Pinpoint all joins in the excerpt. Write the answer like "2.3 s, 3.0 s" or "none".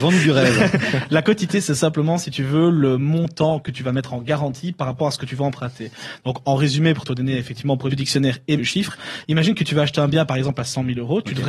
7.9 s, 8.6 s